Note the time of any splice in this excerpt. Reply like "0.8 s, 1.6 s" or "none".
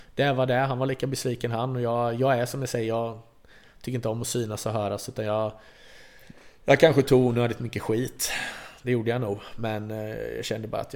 none